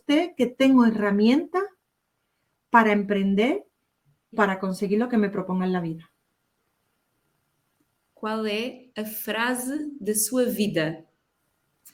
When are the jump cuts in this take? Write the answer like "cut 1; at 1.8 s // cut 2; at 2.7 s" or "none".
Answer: cut 1; at 4.3 s